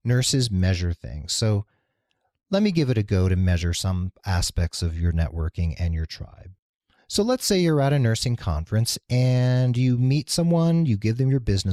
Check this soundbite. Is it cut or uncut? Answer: uncut